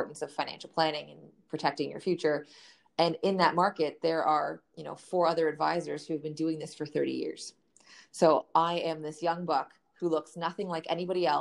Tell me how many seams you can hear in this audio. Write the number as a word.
zero